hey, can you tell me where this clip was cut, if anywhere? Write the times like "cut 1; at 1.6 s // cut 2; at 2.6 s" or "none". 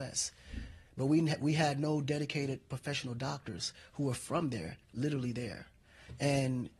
cut 1; at 4.8 s